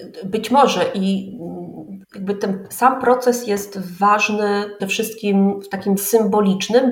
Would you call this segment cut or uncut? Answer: cut